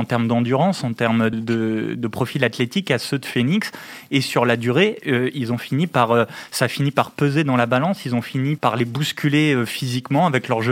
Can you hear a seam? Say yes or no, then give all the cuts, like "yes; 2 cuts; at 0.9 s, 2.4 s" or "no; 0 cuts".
yes; 2 cuts; at 1.3 s, 8.6 s